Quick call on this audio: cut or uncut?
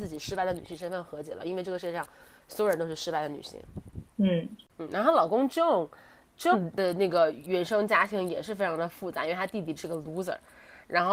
cut